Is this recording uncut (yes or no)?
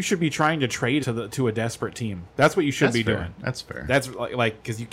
no